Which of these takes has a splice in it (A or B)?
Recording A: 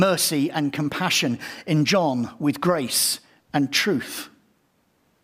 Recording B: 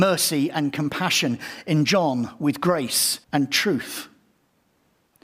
B